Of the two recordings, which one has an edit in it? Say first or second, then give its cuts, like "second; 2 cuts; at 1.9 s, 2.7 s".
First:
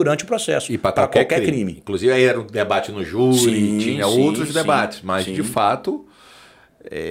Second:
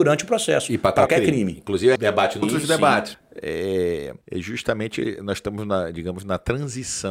second; 5 cuts; at 1.1 s, 2.0 s, 2.4 s, 3.1 s, 4.2 s